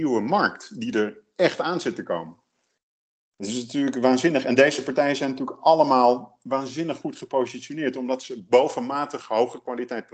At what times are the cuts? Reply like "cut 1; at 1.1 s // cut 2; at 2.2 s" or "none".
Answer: none